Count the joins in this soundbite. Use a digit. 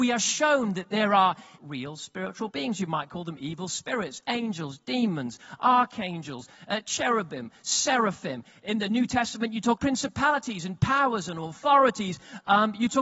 2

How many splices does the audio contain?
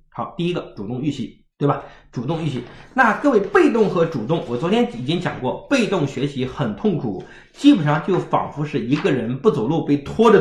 1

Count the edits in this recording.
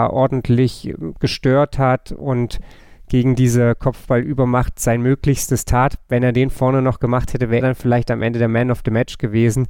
1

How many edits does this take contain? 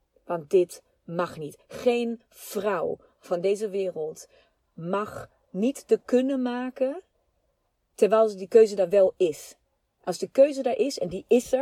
1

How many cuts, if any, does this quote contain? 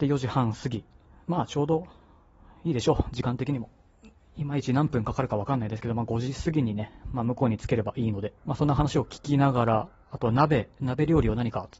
1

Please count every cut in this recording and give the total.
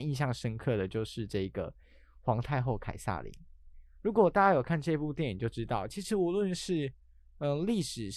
0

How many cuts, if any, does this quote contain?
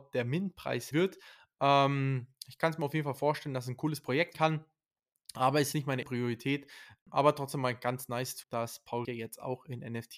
6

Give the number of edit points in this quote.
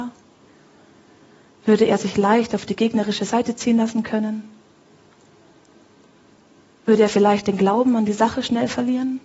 0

